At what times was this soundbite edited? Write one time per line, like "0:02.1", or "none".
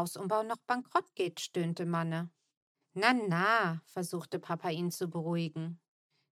none